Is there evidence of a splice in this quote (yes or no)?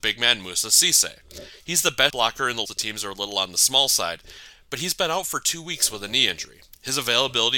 yes